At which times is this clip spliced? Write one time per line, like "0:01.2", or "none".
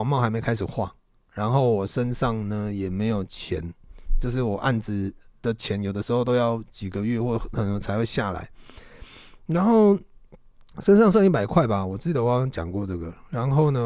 none